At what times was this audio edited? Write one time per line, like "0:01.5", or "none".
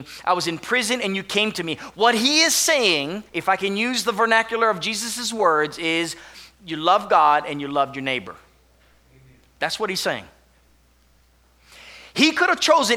0:03.3
0:06.5